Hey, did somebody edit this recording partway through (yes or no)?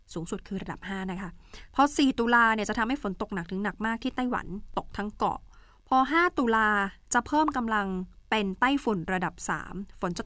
no